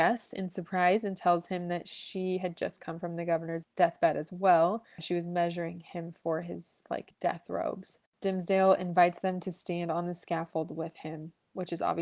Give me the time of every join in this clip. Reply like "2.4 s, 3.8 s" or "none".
none